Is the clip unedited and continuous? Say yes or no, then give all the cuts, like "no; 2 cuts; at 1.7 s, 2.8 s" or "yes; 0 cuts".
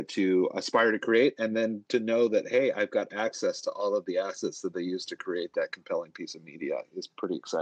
yes; 0 cuts